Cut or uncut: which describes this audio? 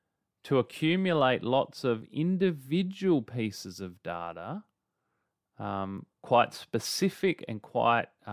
cut